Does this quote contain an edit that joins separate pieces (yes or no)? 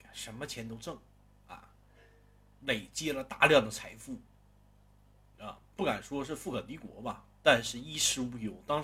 no